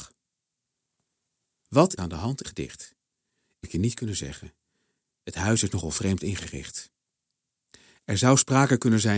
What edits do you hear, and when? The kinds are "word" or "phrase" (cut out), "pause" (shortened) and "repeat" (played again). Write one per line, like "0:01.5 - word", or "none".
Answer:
0:02.0 - phrase
0:02.4 - word
0:03.6 - word

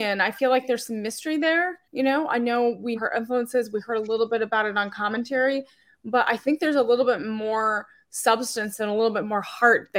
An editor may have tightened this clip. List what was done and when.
0:01.8 - pause
0:03.0 - word

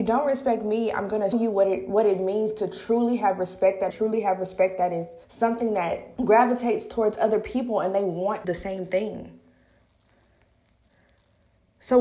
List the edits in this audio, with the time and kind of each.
0:01.3 - word
0:03.9 - phrase
0:05.2 - pause
0:06.2 - pause
0:08.4 - phrase

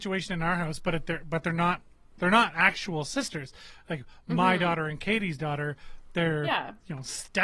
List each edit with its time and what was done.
none

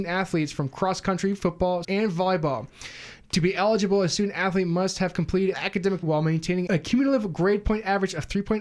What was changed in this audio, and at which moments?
0:01.8 - word
0:05.5 - phrase
0:06.0 - phrase
0:06.7 - word

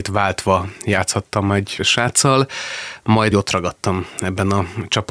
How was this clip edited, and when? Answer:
0:01.8 - word
0:03.3 - word

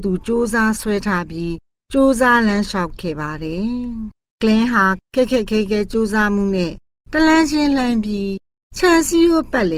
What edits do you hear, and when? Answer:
none

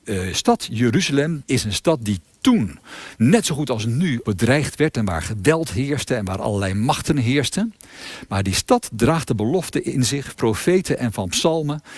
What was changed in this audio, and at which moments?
0:01.4 - word
0:04.2 - word
0:10.3 - word

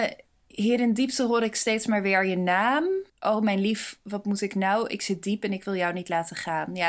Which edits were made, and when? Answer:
0:03.1 - pause

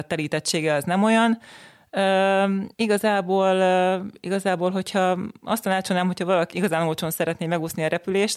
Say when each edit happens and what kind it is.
0:02.7 - pause
0:06.5 - word

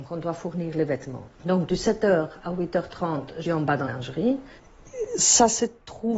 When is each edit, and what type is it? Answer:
0:01.3 - pause
0:03.4 - word
0:03.9 - word

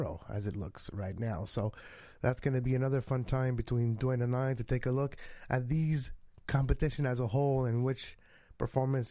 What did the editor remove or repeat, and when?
none

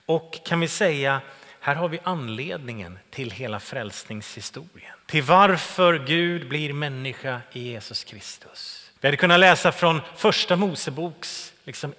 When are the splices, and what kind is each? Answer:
0:05.0 - pause
0:09.0 - pause

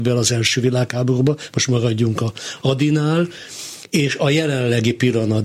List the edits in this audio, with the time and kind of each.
none

